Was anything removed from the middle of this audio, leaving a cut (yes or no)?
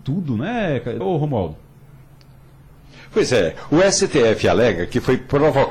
yes